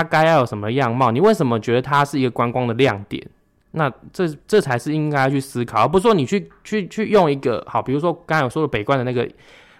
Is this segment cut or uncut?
uncut